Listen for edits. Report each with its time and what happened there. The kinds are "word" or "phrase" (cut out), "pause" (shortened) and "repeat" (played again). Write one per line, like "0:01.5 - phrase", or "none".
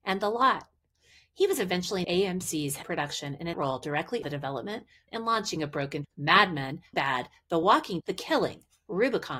0:02.0 - word
0:02.8 - word
0:03.5 - word
0:04.2 - word
0:05.1 - word
0:06.0 - word
0:06.9 - word
0:08.0 - word

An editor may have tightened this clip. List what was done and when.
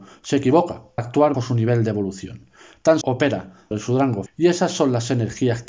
0:01.0 - word
0:01.3 - word
0:03.0 - word
0:03.7 - word
0:04.3 - word

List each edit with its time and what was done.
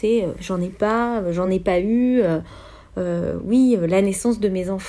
none

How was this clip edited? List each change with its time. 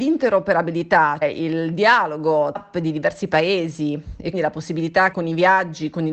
0:01.2 - word
0:02.6 - word
0:04.3 - word
0:05.1 - word

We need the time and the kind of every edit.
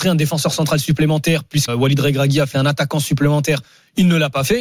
0:01.7 - word
0:02.5 - word

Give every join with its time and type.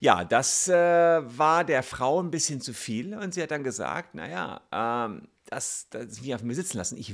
0:05.4 - pause
0:06.2 - word

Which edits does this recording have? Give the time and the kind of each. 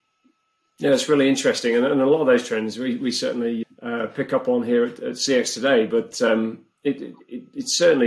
0:03.6 - word

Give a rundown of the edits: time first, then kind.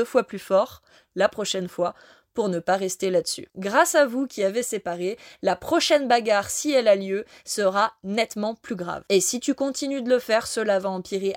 none

